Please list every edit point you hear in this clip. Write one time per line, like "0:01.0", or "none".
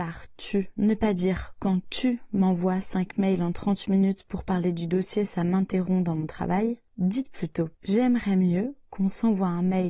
0:07.7